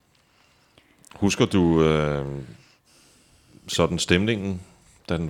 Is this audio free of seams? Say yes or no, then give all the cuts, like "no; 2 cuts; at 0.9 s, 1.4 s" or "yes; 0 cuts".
yes; 0 cuts